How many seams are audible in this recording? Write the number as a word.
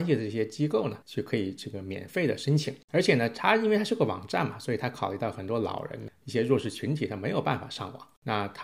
two